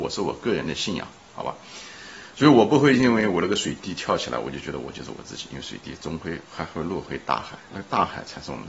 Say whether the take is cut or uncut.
cut